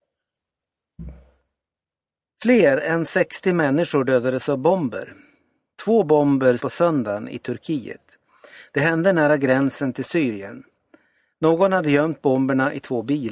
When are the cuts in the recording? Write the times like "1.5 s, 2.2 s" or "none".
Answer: 6.6 s